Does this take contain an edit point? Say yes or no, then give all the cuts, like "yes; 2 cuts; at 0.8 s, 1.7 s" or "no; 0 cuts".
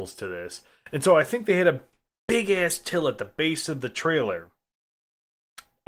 no; 0 cuts